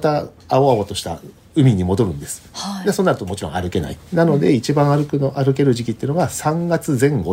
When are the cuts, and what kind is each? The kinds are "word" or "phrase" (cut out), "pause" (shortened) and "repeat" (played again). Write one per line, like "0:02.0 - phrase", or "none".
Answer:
0:02.5 - pause
0:04.1 - pause